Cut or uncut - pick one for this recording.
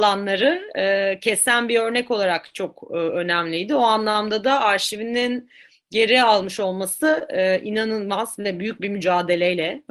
uncut